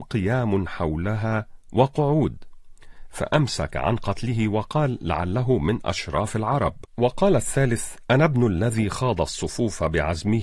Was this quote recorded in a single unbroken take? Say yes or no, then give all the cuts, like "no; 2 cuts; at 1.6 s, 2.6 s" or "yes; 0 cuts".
no; 1 cut; at 6.9 s